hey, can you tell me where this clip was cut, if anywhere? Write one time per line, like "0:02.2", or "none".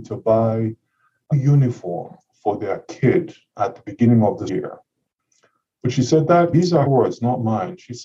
0:01.3
0:04.5
0:06.5
0:06.9